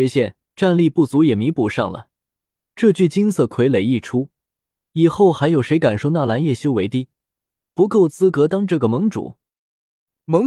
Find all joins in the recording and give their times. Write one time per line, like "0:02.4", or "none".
none

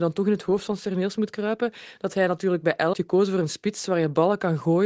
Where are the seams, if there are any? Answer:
0:02.9

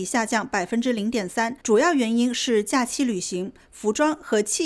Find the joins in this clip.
0:01.6

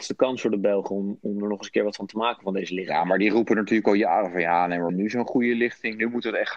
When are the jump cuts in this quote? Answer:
0:04.9

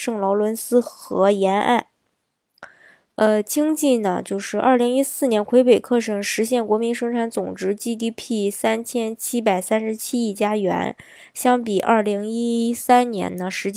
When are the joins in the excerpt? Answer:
none

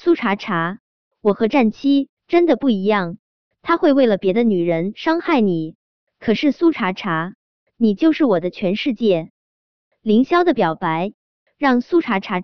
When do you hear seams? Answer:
0:02.2

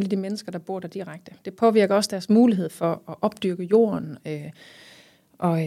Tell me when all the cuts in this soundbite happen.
none

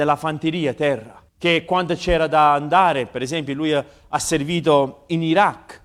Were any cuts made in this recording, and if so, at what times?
0:01.3

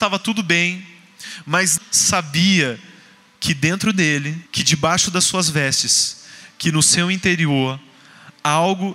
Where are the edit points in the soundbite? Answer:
0:01.8
0:04.5

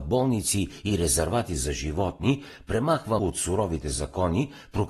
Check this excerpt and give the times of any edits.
0:03.2

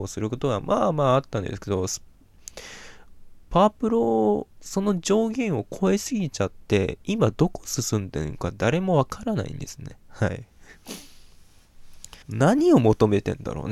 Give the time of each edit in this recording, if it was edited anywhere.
0:04.5
0:12.2

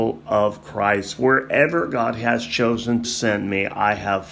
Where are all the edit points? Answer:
0:03.0

